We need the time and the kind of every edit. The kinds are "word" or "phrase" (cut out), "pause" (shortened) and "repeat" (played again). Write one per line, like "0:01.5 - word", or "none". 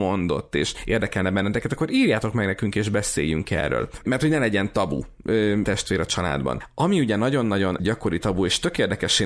0:05.6 - phrase